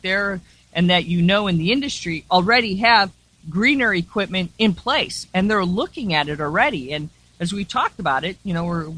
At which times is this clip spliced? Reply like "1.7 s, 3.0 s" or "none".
none